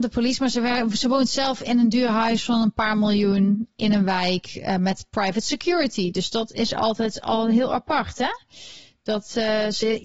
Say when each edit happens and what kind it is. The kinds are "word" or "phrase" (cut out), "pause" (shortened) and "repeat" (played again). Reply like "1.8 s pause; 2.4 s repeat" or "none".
none